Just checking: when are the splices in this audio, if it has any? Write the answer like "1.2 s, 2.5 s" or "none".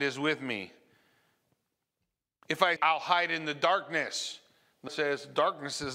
2.8 s, 4.9 s